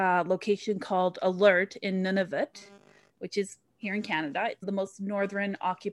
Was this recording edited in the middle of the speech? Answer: yes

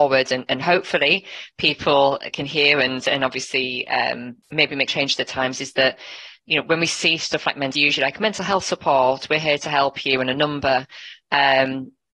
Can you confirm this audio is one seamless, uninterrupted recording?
no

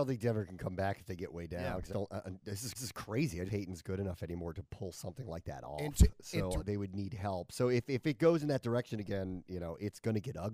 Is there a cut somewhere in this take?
yes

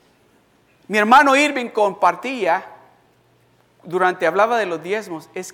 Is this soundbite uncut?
yes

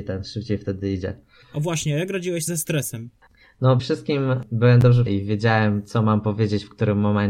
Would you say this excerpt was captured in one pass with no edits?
no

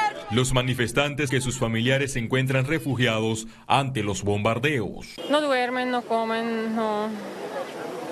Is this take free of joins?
no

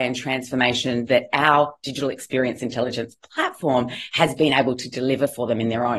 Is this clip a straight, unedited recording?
yes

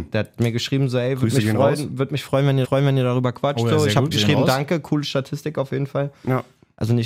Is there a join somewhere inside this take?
yes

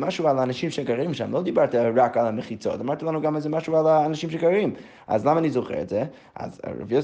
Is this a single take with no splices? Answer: yes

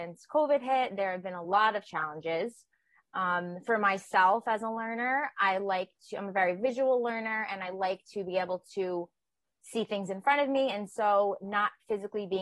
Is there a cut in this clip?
no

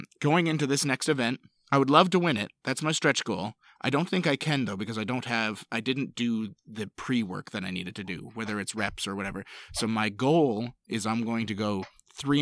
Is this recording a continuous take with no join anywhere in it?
yes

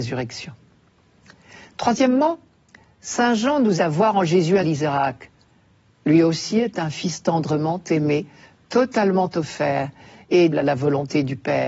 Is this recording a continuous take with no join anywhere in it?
no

